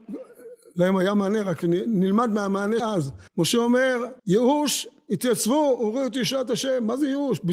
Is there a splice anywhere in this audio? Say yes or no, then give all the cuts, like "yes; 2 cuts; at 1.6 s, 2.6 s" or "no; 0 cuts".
yes; 3 cuts; at 2.8 s, 3.3 s, 4.2 s